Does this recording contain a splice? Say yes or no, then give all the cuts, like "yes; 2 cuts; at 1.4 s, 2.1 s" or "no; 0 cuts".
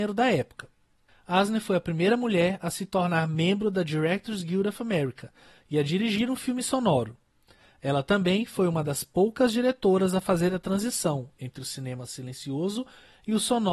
no; 0 cuts